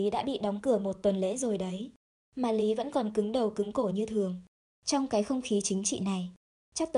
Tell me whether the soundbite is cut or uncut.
uncut